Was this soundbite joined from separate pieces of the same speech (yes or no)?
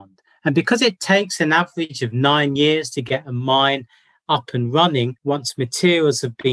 no